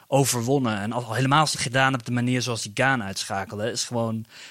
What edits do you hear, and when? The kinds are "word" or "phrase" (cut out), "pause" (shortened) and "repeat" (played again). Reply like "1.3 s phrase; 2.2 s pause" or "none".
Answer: 1.5 s word